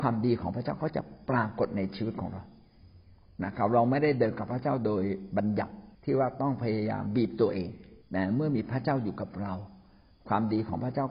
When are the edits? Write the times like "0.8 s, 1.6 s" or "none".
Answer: 5.9 s, 8.0 s